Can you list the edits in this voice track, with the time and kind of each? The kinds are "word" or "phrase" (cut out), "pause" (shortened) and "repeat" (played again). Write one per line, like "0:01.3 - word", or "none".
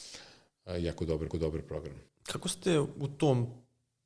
0:01.3 - repeat